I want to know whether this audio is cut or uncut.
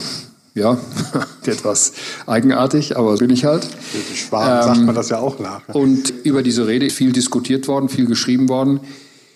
cut